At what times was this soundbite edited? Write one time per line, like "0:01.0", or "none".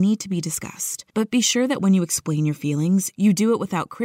0:01.1

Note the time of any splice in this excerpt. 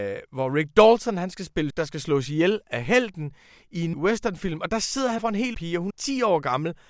0:01.7
0:03.9
0:05.2
0:05.5
0:05.9

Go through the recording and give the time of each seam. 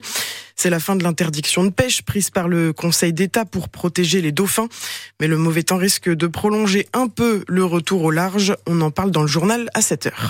none

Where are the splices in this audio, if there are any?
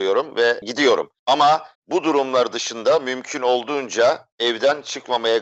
0:01.7
0:04.3

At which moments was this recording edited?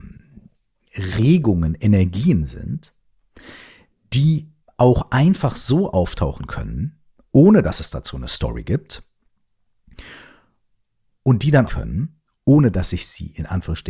0:04.6
0:11.7

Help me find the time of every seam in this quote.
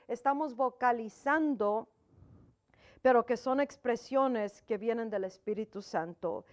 none

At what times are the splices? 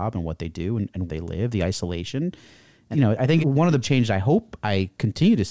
0:01.1
0:02.9
0:03.4
0:03.8

